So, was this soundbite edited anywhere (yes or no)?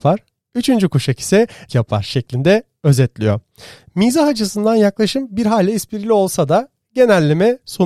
yes